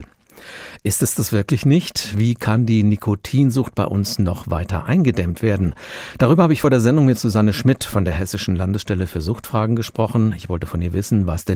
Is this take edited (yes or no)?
no